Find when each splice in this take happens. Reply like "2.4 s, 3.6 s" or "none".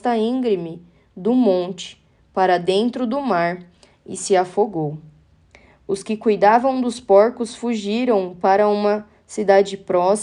none